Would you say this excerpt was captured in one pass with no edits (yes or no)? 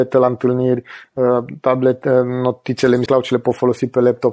no